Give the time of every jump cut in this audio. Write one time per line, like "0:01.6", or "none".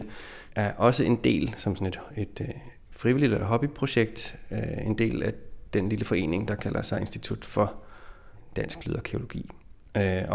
none